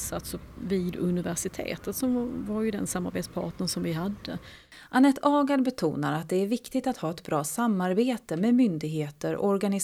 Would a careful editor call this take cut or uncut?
uncut